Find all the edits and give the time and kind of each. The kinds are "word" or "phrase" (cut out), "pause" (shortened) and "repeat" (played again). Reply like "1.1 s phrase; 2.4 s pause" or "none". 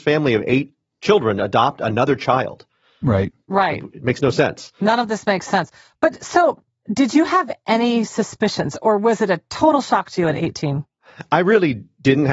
none

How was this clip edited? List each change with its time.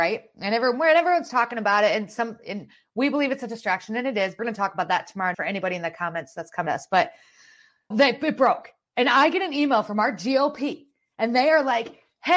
4.4 s word; 5.3 s word; 6.7 s word; 7.9 s word

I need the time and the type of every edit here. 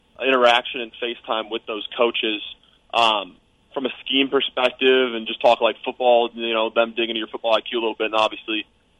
none

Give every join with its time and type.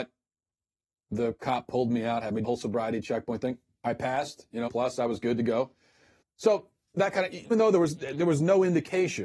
2.4 s word; 4.7 s phrase; 6.2 s pause; 7.5 s word

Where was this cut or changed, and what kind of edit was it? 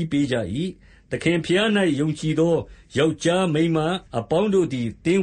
4.1 s pause

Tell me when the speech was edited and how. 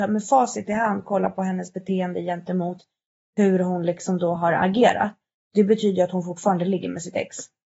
none

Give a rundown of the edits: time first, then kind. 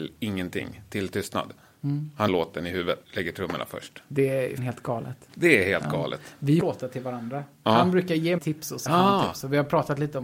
2.3 s word; 3.0 s word; 4.6 s word; 6.6 s word; 8.4 s word; 8.9 s word

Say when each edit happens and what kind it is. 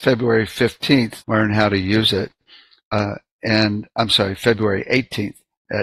1.2 s word

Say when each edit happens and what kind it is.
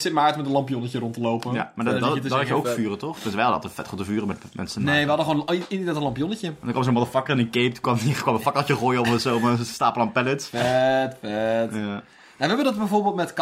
none

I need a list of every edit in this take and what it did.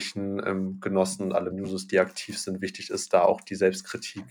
1.5 s word

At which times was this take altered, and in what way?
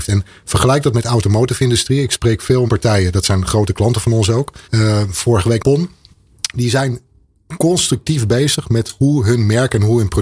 2.7 s phrase; 4.6 s pause; 5.6 s word

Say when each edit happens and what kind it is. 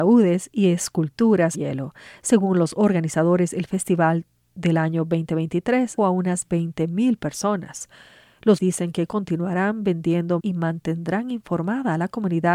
1.5 s word; 6.0 s word; 8.6 s word; 10.4 s word

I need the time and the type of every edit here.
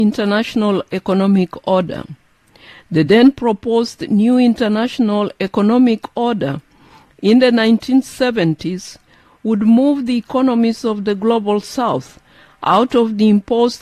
none

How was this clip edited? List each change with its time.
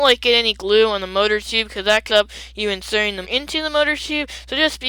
2.1 s word; 3.2 s word

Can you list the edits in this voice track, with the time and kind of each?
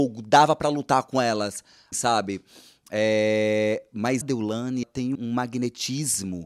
1.9 s word; 4.2 s word; 4.8 s word; 5.2 s word

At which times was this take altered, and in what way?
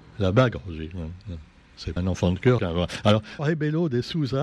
2.0 s word; 2.6 s word; 3.4 s word

